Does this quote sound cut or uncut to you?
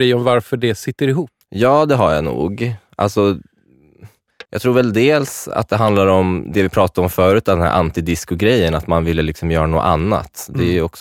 cut